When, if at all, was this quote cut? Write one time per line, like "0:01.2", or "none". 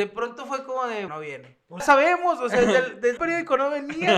0:01.1
0:01.8
0:03.2